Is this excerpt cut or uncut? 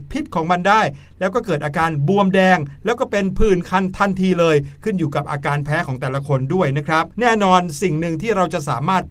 cut